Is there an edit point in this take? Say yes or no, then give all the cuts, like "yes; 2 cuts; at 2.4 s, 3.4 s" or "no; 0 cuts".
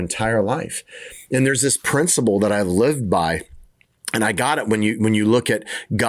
no; 0 cuts